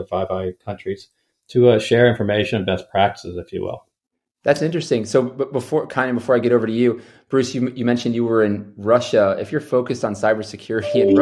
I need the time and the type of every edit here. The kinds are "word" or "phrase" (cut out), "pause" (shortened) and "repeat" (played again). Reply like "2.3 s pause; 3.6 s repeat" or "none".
none